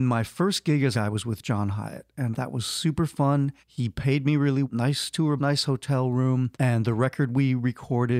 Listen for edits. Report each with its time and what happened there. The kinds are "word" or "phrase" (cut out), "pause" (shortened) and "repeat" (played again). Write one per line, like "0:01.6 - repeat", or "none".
0:00.9 - phrase
0:02.3 - word
0:03.6 - pause
0:04.6 - word
0:05.4 - word
0:06.5 - pause